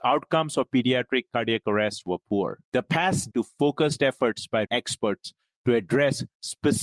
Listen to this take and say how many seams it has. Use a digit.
3